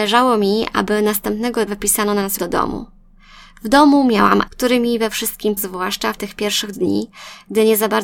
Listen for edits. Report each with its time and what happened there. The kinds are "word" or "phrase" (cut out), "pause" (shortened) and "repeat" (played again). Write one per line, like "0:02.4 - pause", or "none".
0:01.7 - word
0:02.4 - word
0:04.5 - word
0:05.6 - word
0:06.2 - word
0:06.7 - word